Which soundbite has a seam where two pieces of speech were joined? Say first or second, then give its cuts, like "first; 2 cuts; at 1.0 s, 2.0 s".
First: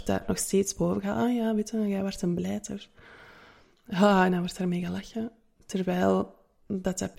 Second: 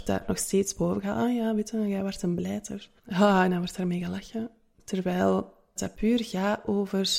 second; 2 cuts; at 3.0 s, 5.8 s